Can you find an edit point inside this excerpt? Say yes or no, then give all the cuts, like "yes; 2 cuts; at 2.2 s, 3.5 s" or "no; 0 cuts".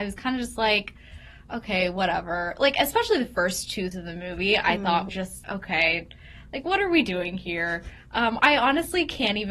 yes; 4 cuts; at 3.9 s, 5.1 s, 5.4 s, 8.4 s